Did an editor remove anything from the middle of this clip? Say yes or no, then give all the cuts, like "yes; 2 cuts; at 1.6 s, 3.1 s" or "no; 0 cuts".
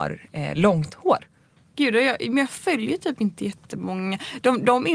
yes; 2 cuts; at 1.6 s, 3.6 s